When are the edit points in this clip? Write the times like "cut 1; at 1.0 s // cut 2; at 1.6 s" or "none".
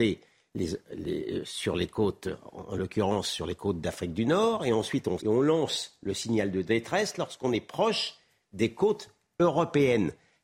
cut 1; at 5.2 s

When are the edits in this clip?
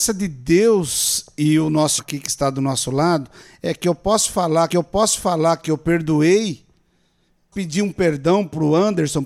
cut 1; at 2.0 s // cut 2; at 4.7 s // cut 3; at 7.5 s

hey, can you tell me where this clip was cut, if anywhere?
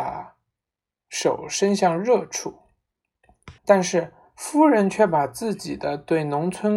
cut 1; at 3.6 s

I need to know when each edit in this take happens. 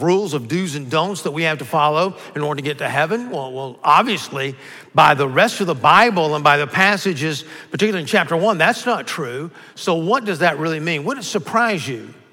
none

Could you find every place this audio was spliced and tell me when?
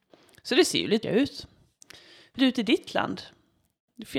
cut 1; at 1.0 s // cut 2; at 2.4 s

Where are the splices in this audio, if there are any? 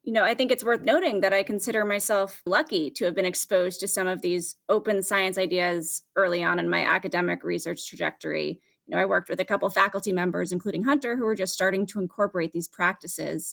cut 1; at 2.5 s

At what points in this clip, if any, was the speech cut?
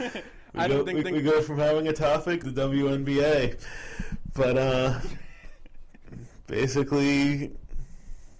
cut 1; at 1.0 s // cut 2; at 2.4 s

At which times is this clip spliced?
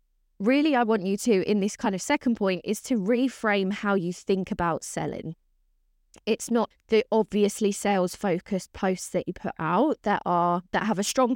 cut 1; at 6.7 s

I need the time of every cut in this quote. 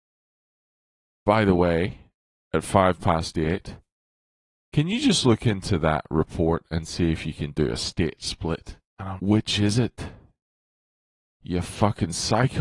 cut 1; at 8.9 s // cut 2; at 9.2 s

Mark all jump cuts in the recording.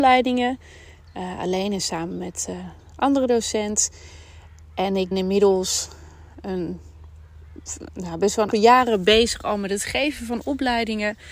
cut 1; at 5.1 s // cut 2; at 8.5 s

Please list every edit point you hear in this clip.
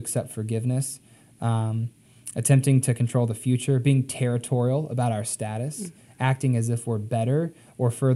none

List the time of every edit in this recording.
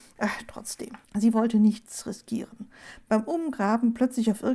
cut 1; at 1.0 s

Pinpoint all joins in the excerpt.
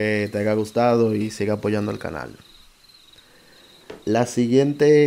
cut 1; at 4.0 s

